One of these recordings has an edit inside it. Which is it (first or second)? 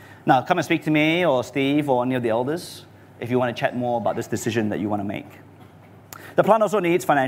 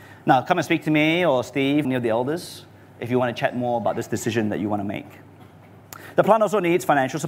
second